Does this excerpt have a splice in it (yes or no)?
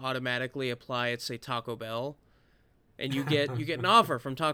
no